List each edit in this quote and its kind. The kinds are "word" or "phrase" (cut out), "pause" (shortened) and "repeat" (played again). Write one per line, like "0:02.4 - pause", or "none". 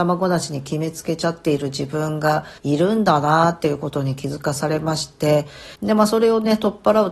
0:02.6 - pause
0:05.7 - pause